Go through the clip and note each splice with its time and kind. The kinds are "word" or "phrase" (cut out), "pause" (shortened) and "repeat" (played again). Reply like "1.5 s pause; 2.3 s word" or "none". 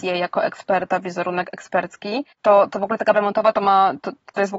2.3 s pause; 3.1 s word